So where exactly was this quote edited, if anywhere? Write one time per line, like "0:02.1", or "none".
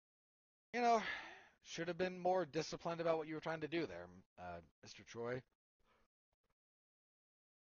none